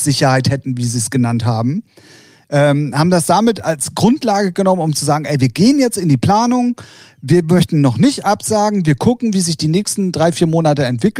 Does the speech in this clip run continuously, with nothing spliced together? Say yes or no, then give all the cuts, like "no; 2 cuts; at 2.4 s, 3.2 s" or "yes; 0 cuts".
yes; 0 cuts